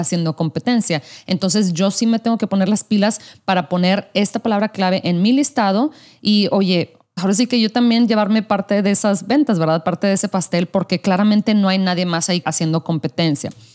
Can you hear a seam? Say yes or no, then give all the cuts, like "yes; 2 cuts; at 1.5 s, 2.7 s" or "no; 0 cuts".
yes; 2 cuts; at 7.2 s, 12.4 s